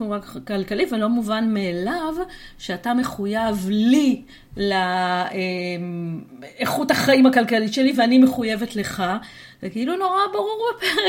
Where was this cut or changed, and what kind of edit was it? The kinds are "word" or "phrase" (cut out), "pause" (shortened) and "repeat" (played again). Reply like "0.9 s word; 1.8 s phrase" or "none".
none